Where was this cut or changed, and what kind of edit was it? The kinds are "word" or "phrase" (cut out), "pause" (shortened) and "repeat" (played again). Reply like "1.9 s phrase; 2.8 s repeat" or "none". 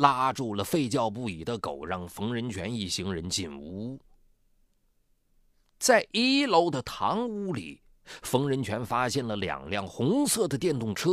none